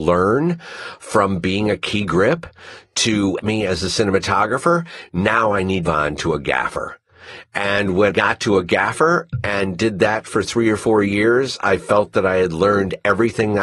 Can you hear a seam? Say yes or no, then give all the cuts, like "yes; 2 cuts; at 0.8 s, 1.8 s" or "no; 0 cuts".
yes; 3 cuts; at 3.4 s, 5.8 s, 8.1 s